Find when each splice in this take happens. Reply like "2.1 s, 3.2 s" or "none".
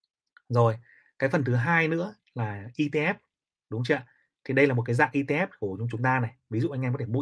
none